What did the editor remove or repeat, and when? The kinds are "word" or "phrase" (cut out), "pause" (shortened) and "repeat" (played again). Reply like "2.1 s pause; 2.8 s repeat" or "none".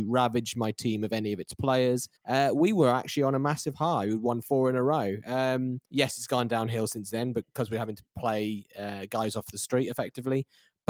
2.2 s pause; 5.8 s pause